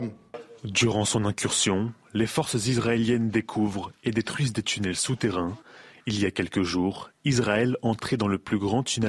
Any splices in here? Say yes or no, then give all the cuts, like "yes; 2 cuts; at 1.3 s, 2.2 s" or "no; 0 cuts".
no; 0 cuts